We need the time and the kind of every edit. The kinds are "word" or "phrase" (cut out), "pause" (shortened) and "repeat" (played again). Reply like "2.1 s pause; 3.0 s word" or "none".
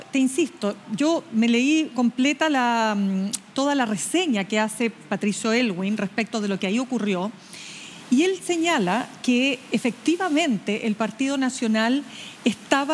none